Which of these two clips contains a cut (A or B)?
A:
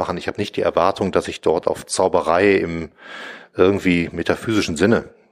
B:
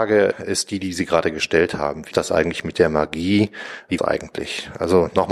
B